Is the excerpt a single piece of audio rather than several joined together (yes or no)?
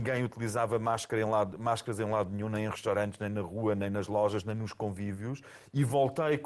yes